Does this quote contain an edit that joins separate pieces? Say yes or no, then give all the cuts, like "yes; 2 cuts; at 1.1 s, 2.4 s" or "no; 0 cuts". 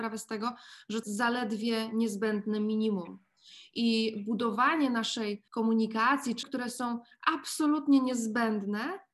yes; 3 cuts; at 1.0 s, 5.5 s, 6.4 s